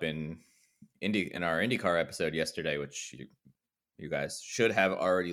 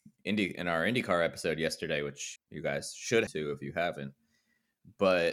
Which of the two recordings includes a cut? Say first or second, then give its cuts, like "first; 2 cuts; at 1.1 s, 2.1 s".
second; 2 cuts; at 2.4 s, 3.3 s